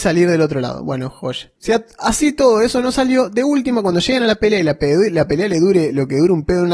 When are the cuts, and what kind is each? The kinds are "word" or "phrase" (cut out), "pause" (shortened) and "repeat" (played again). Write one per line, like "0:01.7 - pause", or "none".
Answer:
0:01.6 - pause